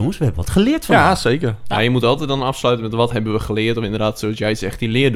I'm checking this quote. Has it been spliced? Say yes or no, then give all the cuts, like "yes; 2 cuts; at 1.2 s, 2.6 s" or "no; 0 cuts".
no; 0 cuts